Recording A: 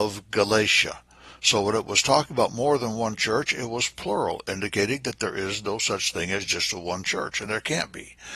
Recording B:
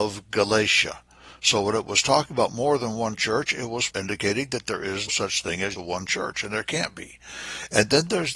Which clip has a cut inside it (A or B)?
B